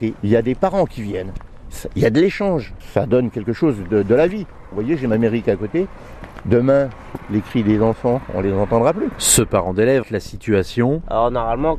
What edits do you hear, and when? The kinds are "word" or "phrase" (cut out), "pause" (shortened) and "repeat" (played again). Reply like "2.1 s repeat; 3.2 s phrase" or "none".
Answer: 10.0 s word

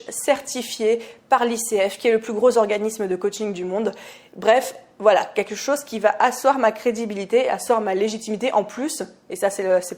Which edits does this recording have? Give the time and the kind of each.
none

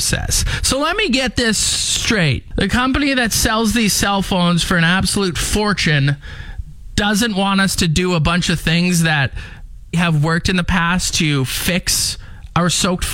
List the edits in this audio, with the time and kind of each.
9.9 s word

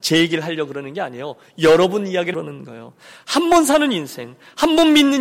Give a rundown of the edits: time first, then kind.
2.3 s word

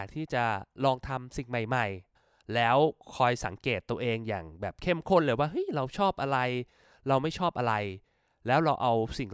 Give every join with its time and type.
none

